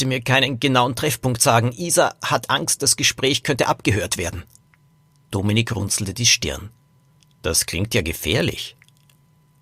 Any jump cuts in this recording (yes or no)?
no